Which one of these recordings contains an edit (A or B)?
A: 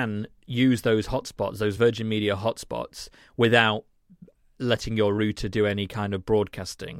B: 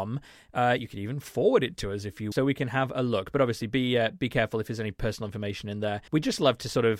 B